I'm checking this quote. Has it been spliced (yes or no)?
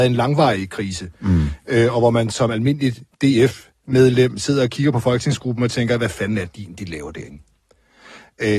no